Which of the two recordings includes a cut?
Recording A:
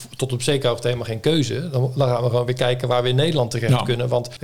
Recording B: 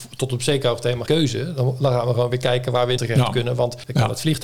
B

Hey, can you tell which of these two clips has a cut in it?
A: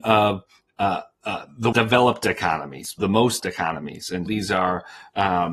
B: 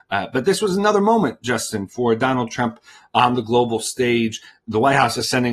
A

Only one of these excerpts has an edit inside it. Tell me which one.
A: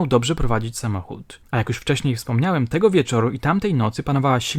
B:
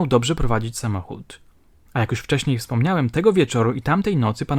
A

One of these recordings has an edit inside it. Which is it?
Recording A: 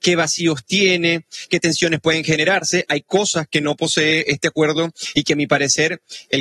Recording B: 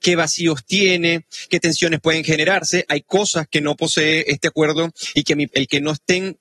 B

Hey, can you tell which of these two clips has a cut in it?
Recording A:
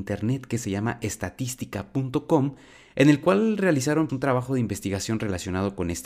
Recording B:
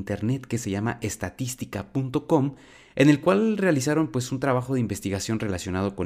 A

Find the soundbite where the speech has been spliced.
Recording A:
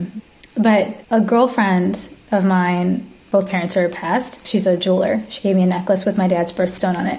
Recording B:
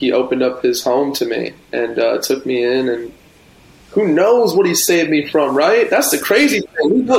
A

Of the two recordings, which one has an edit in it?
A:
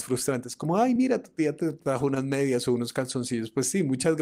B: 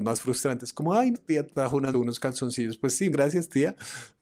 B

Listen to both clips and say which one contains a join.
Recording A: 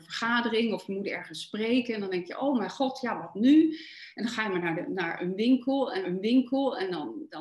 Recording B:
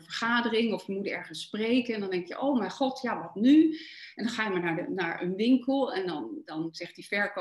A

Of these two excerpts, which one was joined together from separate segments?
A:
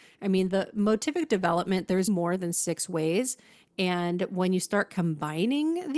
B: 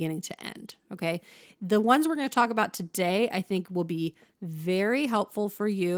A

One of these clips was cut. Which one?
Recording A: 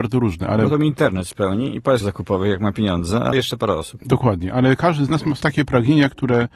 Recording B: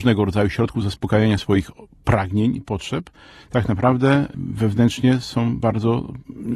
A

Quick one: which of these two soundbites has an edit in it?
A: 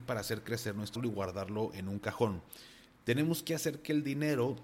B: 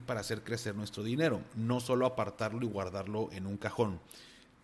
A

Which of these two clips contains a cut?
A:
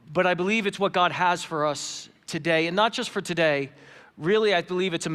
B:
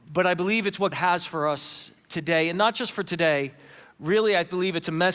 B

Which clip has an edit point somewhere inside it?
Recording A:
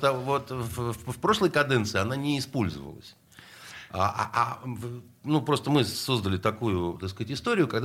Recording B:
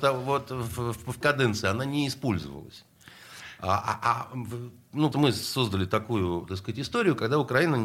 B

